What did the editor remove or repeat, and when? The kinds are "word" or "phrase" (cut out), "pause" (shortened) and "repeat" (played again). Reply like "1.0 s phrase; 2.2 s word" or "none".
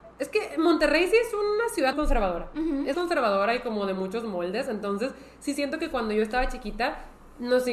1.9 s word; 2.9 s word